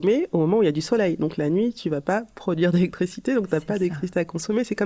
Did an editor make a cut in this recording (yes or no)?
no